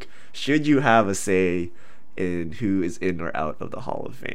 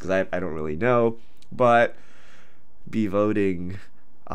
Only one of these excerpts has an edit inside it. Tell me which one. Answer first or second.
second